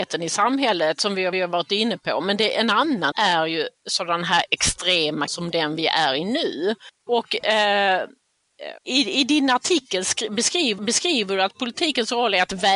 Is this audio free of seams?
no; 6 cuts; at 1.3 s, 3.1 s, 5.3 s, 6.9 s, 8.8 s, 10.8 s

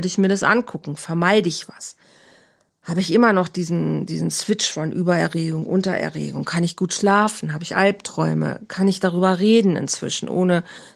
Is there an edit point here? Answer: no; 0 cuts

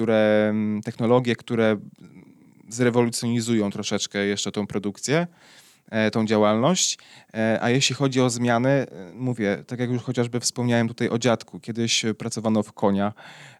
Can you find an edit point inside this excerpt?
no; 0 cuts

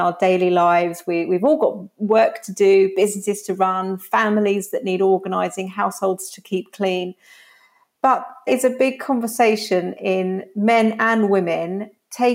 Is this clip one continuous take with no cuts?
no; 1 cut; at 8.5 s

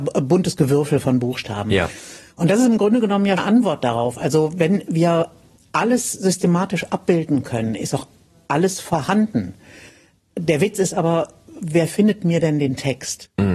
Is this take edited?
yes; 1 cut; at 3.4 s

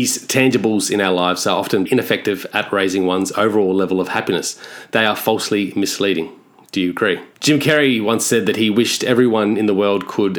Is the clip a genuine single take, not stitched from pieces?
no; 2 cuts; at 1.9 s, 7.3 s

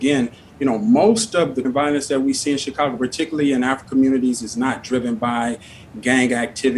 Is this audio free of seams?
no; 2 cuts; at 1.6 s, 3.8 s

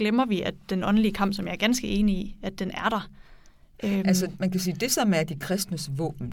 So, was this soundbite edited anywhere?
no; 0 cuts

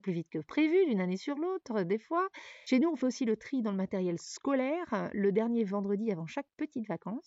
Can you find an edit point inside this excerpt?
no; 0 cuts

